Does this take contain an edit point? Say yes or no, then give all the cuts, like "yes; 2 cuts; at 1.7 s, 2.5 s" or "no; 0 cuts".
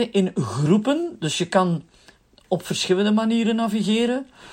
no; 0 cuts